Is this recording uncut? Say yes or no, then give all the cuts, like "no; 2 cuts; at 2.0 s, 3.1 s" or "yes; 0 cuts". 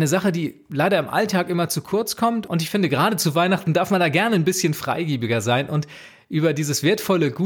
yes; 0 cuts